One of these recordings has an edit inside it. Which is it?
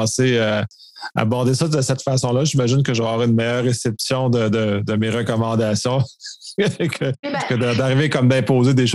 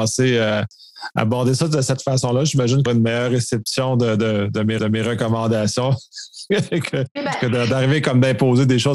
second; 2 cuts; at 2.9 s, 4.8 s

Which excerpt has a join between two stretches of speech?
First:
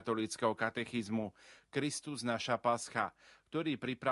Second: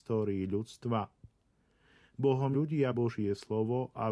second; 2 cuts; at 2.5 s, 2.9 s

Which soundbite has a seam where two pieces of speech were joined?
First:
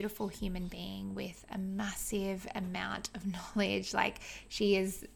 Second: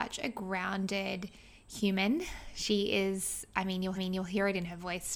second; 1 cut; at 3.9 s

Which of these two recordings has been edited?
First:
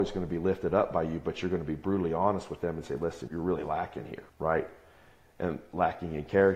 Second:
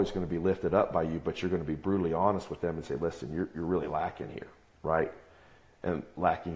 first; 2 cuts; at 3.3 s, 4.3 s

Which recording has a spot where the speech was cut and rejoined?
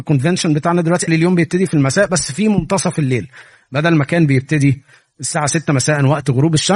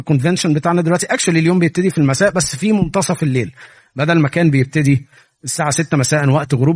first; 1 cut; at 1.1 s

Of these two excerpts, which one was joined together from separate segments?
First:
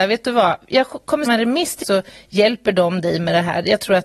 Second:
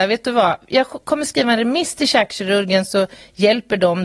first; 2 cuts; at 1.3 s, 1.8 s

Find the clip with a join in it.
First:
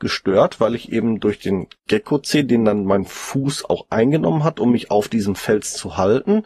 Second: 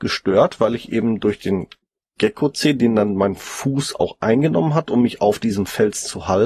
first; 1 cut; at 1.8 s

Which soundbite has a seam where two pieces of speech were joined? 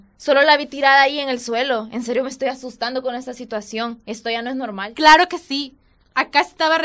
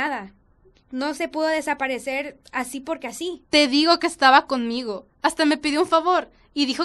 second; 1 cut; at 5.1 s

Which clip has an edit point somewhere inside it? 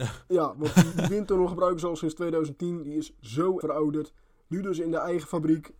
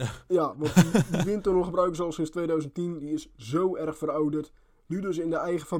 first; 2 cuts; at 0.9 s, 3.6 s

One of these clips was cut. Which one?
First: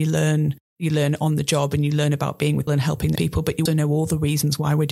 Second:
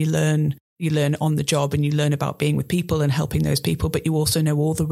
first; 3 cuts; at 2.7 s, 3.2 s, 3.7 s

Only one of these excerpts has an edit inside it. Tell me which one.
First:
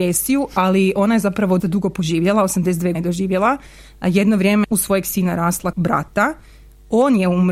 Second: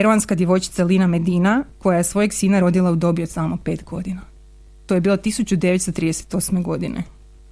first; 4 cuts; at 1.6 s, 2.9 s, 4.6 s, 5.7 s

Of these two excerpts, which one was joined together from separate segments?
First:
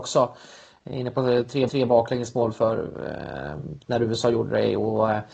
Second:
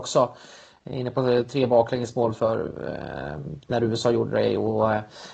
first; 1 cut; at 1.7 s

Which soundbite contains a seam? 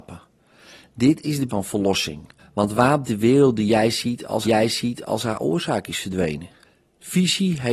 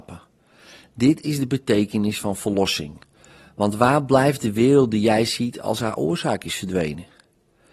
first; 5 cuts; at 1.5 s, 2.4 s, 3.0 s, 4.4 s, 6.6 s

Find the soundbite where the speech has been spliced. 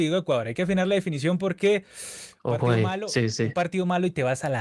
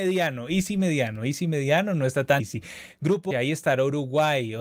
second; 2 cuts; at 2.4 s, 3.3 s

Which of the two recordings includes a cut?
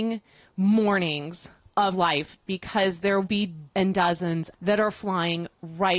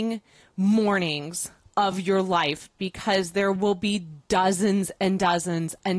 first; 4 cuts; at 1.9 s, 3.2 s, 3.7 s, 4.5 s

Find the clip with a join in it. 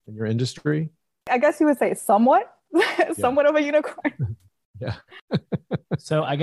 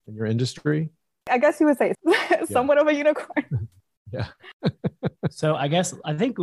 second; 1 cut; at 1.9 s

